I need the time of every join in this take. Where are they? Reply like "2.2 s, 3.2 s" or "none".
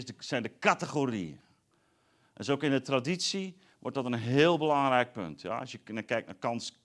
none